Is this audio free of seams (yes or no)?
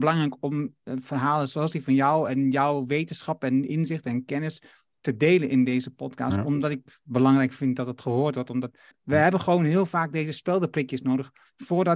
no